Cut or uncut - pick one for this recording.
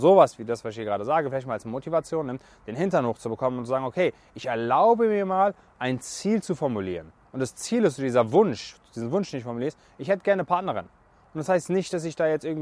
uncut